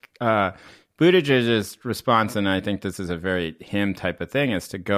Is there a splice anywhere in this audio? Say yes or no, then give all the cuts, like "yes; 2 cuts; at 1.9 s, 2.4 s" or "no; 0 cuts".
no; 0 cuts